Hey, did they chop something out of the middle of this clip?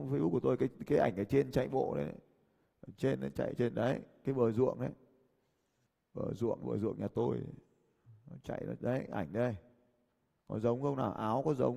yes; 2 cuts; at 3.6 s, 6.6 s

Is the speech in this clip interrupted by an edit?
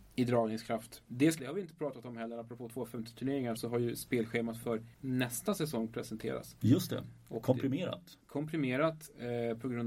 yes; 3 cuts; at 1.4 s, 3.6 s, 4.9 s

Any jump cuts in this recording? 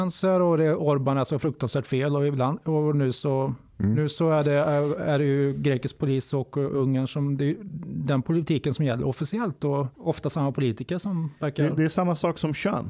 yes; 1 cut; at 9.9 s

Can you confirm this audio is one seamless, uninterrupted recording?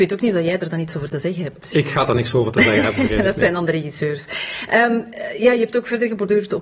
yes; 0 cuts

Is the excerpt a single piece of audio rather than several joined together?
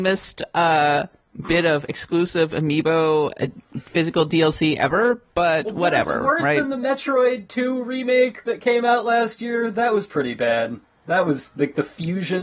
yes; 0 cuts

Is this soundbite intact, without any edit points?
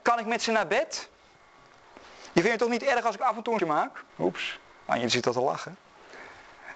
no; 2 cuts; at 3.6 s, 4.1 s

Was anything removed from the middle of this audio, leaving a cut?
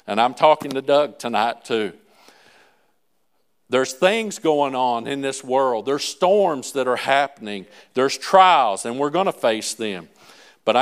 no; 0 cuts

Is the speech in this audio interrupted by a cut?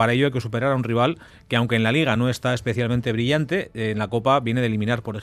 no; 0 cuts

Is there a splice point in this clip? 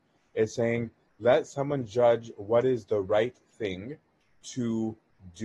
no; 0 cuts

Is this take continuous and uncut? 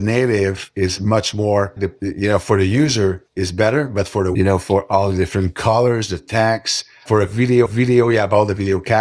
no; 4 cuts; at 1.8 s, 3.3 s, 4.3 s, 7.7 s

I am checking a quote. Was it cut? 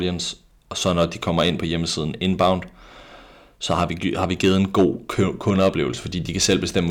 no; 0 cuts

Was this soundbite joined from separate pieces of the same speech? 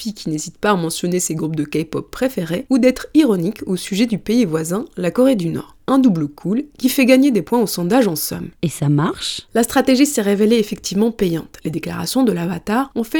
no; 0 cuts

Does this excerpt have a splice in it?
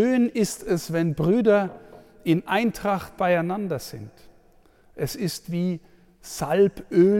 no; 0 cuts

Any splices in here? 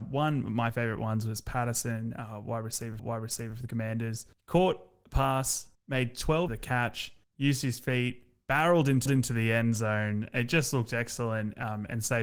yes; 5 cuts; at 3.0 s, 5.7 s, 6.5 s, 7.2 s, 9.1 s

